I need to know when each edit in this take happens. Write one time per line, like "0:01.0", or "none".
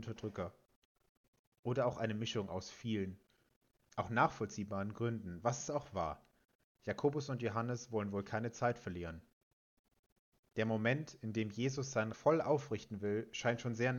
0:12.1